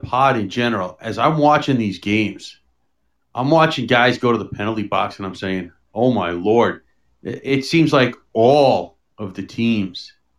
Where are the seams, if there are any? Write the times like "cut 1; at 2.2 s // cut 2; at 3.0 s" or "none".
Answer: none